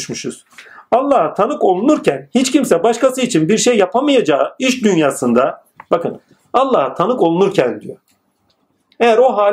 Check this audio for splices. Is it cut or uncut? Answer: uncut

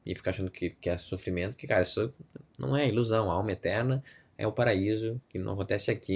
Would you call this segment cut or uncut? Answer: uncut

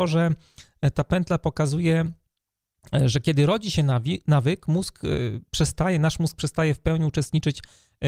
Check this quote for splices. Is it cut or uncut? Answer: uncut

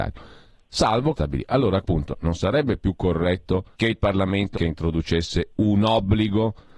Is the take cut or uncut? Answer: cut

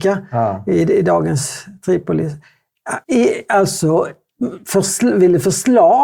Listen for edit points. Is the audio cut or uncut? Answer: cut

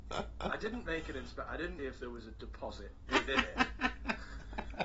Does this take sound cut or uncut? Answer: cut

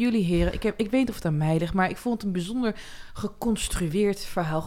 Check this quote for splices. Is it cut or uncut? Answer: uncut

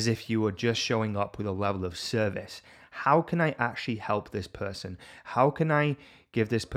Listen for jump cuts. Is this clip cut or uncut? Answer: uncut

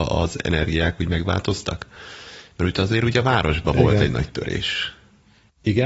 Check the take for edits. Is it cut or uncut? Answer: uncut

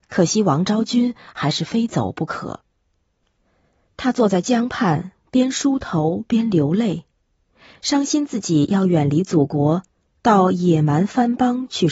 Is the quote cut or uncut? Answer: uncut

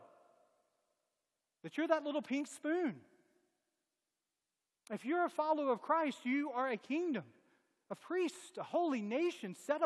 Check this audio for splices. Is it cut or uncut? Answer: uncut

